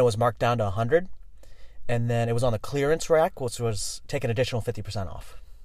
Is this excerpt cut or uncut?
uncut